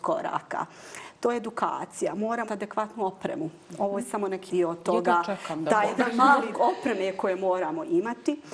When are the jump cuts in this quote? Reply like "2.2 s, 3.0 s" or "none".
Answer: 2.4 s, 4.5 s, 6.5 s